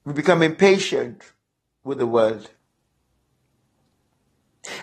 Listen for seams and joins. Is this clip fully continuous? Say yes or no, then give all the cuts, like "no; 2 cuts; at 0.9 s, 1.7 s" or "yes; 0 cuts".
yes; 0 cuts